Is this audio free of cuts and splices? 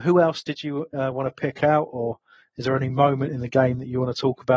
yes; 0 cuts

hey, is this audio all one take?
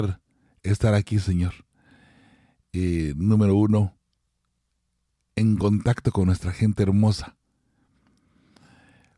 yes; 0 cuts

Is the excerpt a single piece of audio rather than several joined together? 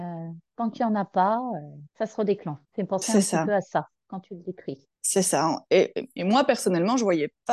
no; 3 cuts; at 1.9 s, 2.6 s, 4.9 s

